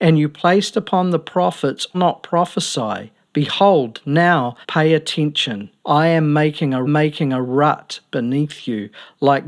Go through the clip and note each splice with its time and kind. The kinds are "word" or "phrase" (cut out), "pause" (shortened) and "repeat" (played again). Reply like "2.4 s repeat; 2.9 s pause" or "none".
1.9 s phrase; 4.6 s pause; 5.8 s pause; 6.9 s repeat